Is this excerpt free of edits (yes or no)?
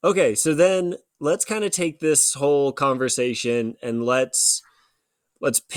yes